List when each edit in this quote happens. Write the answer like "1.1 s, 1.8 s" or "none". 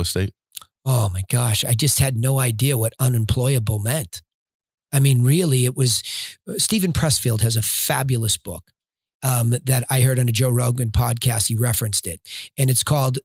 none